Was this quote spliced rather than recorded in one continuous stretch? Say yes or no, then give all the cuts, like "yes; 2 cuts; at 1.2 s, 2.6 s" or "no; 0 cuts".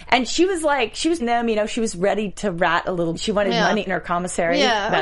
yes; 4 cuts; at 1.2 s, 2.3 s, 3.1 s, 3.9 s